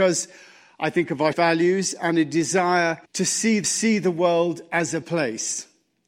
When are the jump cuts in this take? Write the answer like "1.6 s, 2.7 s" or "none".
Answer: 1.3 s, 3.0 s, 3.6 s, 5.0 s